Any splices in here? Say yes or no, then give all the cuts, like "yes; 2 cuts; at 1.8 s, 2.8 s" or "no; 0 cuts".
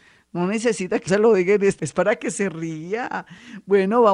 yes; 2 cuts; at 1.1 s, 1.8 s